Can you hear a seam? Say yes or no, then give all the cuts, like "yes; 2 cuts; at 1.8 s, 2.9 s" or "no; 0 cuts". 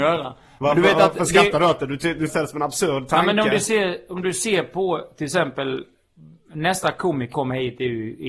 yes; 2 cuts; at 2.3 s, 7.3 s